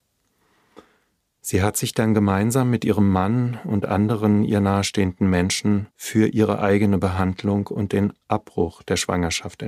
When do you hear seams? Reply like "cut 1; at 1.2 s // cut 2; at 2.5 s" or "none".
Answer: cut 1; at 5.9 s